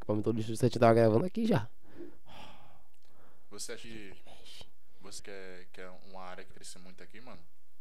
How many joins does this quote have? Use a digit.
3